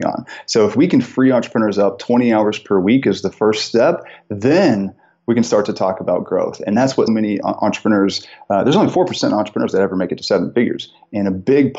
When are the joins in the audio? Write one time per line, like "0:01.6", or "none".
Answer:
0:07.1
0:07.4